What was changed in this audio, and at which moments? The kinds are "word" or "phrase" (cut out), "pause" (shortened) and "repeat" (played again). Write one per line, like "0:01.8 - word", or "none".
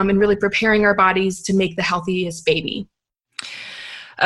none

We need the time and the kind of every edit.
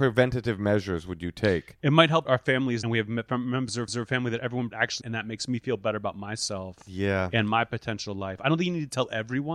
0:02.2 - phrase
0:02.8 - phrase
0:03.9 - repeat
0:04.7 - phrase
0:05.0 - phrase

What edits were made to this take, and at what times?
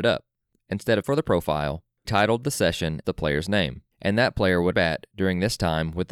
0:01.0 - word
0:02.0 - word
0:03.0 - word
0:03.9 - pause
0:04.7 - phrase

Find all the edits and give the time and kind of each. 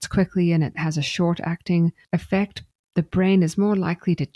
none

